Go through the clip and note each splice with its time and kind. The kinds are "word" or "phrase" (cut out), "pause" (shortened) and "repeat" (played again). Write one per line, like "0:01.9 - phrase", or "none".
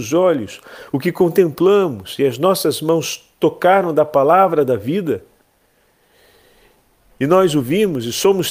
none